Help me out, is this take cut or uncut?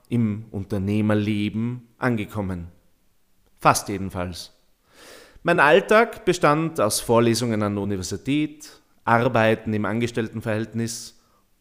uncut